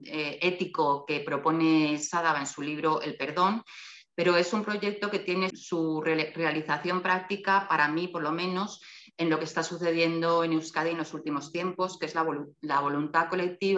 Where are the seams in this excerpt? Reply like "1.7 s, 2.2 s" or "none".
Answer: 5.5 s